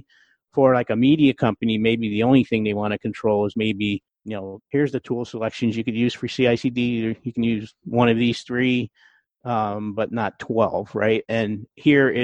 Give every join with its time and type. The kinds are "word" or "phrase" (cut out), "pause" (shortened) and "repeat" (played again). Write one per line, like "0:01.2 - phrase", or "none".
0:04.1 - pause